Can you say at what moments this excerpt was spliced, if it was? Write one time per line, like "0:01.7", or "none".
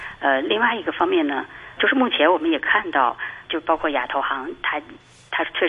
0:01.8
0:03.4